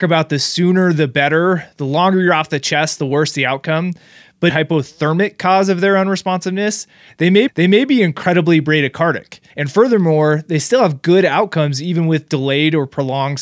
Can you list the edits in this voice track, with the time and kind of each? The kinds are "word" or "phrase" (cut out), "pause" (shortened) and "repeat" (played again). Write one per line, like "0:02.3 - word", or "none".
0:04.5 - phrase
0:07.5 - repeat
0:09.5 - pause